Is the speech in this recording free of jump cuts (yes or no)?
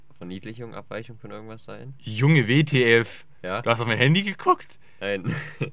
yes